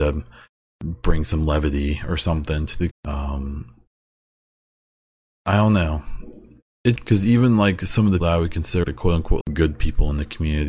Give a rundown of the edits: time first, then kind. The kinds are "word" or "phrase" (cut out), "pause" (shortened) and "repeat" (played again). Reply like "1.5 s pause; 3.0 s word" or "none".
2.9 s word; 7.0 s word; 8.2 s word; 8.8 s word; 9.4 s word